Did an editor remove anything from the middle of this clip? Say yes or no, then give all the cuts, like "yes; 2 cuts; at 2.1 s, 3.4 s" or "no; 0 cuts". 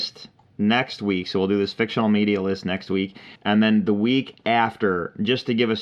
yes; 1 cut; at 3.4 s